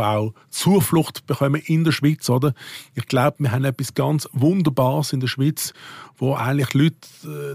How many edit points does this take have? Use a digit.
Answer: 0